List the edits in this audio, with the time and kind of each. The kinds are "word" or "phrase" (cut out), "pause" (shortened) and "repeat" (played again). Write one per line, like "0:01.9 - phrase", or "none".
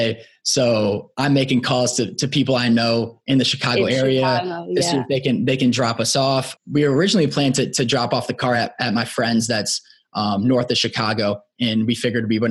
none